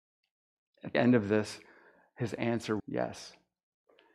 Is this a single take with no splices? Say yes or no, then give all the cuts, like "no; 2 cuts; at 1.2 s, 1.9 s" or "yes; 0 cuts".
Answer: no; 2 cuts; at 0.9 s, 2.8 s